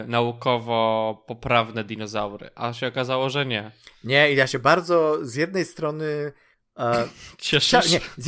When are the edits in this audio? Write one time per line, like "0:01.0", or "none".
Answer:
none